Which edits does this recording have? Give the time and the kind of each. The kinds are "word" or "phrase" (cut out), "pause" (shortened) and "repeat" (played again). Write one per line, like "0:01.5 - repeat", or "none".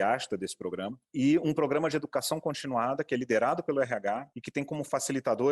none